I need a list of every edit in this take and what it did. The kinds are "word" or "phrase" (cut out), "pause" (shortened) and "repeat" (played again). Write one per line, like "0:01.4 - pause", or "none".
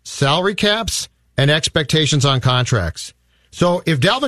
none